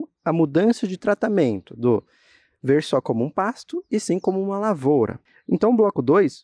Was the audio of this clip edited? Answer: no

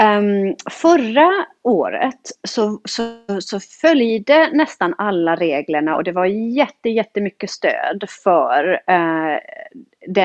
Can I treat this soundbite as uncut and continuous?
no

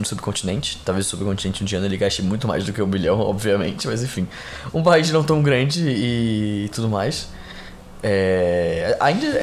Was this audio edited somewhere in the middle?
no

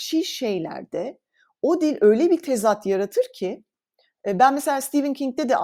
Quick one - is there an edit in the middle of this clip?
no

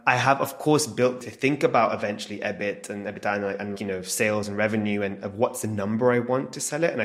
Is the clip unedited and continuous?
no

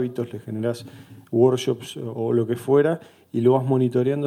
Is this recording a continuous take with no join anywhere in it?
yes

